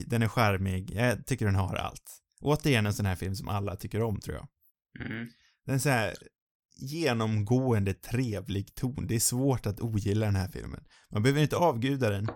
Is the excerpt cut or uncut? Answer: uncut